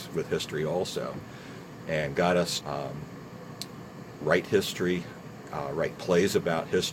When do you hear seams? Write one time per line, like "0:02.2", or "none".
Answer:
0:02.6